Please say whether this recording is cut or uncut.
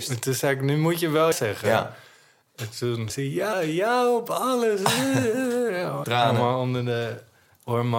cut